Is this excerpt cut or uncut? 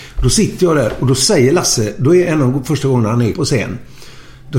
cut